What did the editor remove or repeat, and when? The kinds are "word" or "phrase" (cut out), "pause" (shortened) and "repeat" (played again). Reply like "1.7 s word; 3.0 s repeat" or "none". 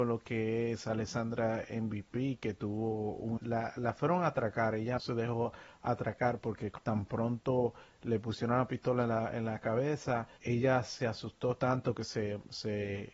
3.4 s word; 5.0 s word; 10.4 s word